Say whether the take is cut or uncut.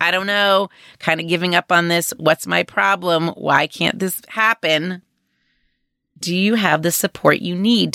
uncut